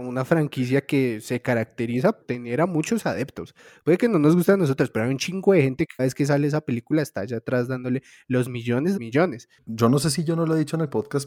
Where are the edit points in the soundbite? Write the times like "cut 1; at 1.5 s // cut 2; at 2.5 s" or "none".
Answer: cut 1; at 2.2 s // cut 2; at 6.0 s // cut 3; at 9.0 s